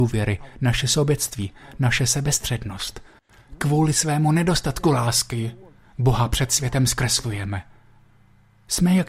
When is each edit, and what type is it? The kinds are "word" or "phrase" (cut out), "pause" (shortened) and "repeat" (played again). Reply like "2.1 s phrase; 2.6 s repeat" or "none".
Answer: none